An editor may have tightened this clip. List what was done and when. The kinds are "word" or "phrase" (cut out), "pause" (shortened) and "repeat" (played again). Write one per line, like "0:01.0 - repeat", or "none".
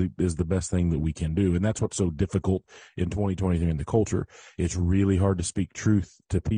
none

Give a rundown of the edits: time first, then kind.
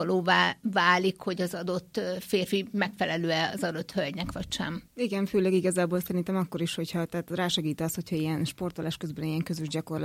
0:04.9 - pause

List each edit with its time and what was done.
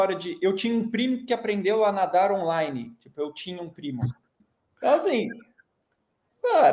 0:04.4 - pause

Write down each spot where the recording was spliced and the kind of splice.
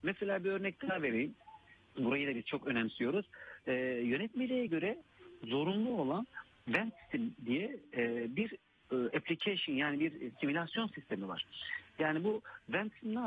none

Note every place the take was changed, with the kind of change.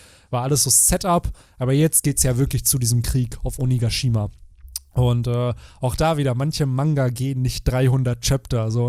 none

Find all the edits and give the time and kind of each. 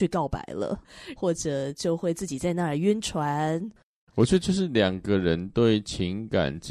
none

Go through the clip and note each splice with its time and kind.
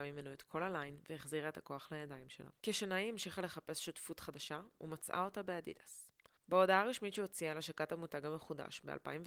0:02.6 - pause
0:06.4 - pause

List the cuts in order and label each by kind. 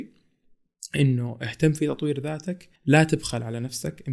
0:02.8 - pause

